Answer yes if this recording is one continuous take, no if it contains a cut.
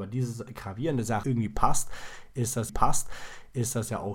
no